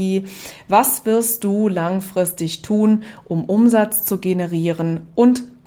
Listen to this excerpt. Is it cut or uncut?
uncut